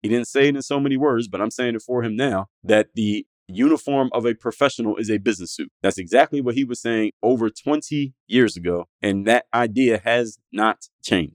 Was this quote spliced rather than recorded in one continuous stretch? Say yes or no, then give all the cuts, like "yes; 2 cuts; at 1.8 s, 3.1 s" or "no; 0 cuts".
yes; 4 cuts; at 2.5 s, 3.4 s, 5.7 s, 8.9 s